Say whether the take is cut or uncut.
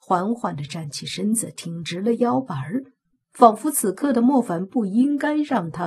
uncut